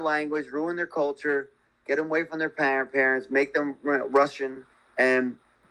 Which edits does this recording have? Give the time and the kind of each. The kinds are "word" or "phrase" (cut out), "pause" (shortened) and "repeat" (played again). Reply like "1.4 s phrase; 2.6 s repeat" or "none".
none